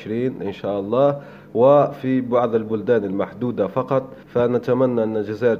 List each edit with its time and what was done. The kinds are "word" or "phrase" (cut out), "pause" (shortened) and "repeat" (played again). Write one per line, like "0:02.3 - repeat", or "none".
0:04.2 - pause